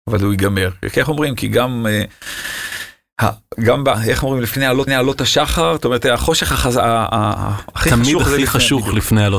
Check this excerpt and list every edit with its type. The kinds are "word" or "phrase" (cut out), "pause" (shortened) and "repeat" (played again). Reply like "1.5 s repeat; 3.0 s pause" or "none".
4.9 s repeat

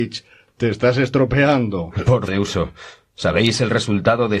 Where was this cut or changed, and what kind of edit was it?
2.3 s word

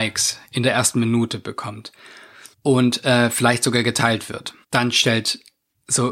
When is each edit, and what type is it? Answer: 2.5 s pause; 4.6 s pause

